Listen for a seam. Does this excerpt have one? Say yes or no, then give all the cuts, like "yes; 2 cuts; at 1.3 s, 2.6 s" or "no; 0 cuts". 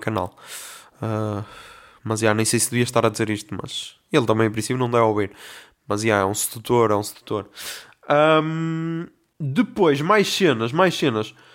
no; 0 cuts